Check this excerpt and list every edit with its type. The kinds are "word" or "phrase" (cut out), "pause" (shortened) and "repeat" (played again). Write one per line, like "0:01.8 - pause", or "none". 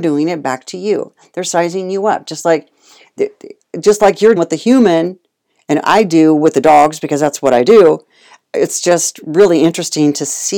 0:04.4 - word

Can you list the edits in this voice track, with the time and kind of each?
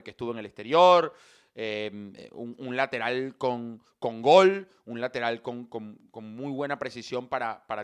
none

